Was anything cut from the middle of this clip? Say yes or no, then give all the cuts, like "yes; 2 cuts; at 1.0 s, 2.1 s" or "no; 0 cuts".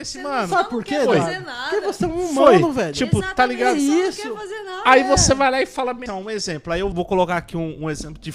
yes; 2 cuts; at 6.1 s, 6.9 s